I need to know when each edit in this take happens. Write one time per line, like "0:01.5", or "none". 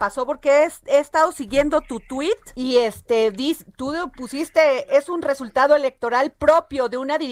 0:02.5